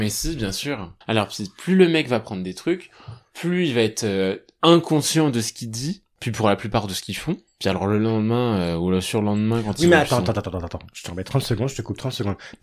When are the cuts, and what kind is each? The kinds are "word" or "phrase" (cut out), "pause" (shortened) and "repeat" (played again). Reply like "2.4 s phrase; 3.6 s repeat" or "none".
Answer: 1.0 s pause